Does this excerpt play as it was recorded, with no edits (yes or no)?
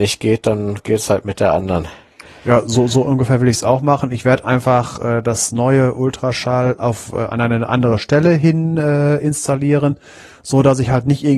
yes